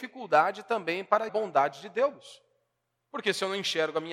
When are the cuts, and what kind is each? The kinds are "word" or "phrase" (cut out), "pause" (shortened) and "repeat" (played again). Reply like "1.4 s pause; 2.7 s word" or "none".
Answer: 1.3 s phrase